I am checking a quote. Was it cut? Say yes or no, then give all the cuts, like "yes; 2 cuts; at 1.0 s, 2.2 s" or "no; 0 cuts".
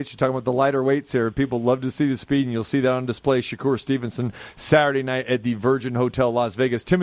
no; 0 cuts